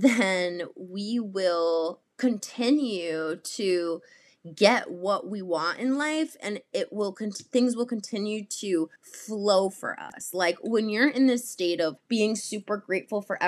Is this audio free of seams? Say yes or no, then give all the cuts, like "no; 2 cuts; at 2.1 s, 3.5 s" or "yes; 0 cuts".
no; 3 cuts; at 2.0 s, 9.0 s, 12.0 s